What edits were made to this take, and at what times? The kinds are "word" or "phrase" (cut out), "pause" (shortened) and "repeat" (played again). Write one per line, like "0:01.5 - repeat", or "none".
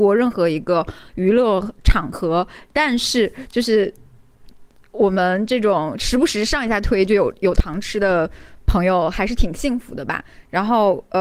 none